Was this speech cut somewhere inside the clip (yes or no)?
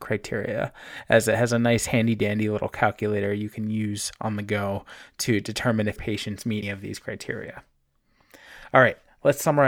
yes